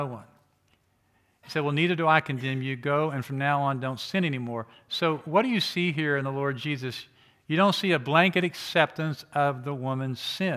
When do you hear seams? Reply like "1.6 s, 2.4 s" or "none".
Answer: none